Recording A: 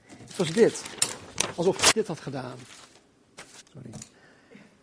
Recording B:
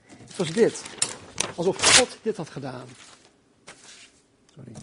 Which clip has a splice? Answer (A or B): A